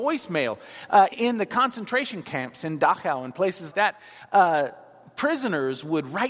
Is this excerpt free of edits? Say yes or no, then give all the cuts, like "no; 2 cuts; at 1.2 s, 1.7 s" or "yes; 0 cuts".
no; 2 cuts; at 1.1 s, 3.7 s